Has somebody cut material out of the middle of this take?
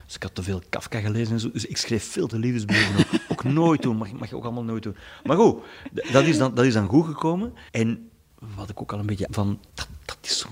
yes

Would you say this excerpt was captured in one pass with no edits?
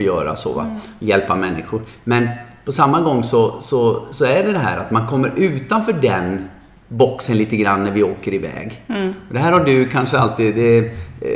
yes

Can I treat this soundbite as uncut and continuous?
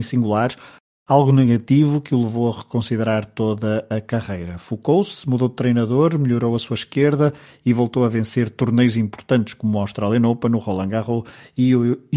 yes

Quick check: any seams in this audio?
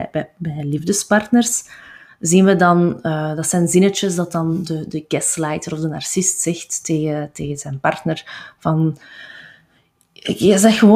no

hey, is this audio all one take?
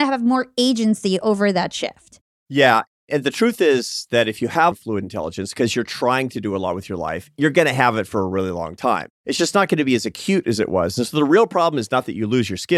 no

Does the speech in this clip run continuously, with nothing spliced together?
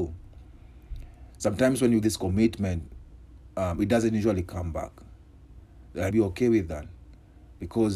no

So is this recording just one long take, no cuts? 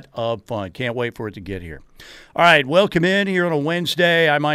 yes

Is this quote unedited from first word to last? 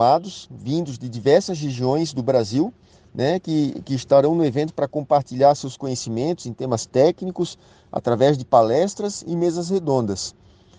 yes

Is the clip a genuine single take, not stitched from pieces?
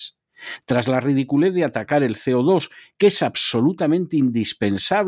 yes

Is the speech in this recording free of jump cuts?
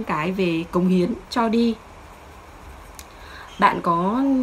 yes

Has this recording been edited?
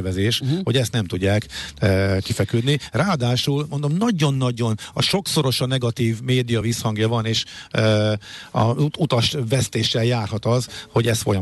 no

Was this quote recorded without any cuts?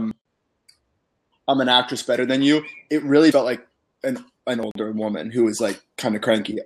no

